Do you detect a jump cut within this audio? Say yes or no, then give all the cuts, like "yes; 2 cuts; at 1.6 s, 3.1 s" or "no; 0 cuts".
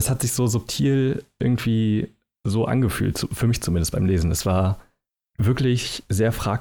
no; 0 cuts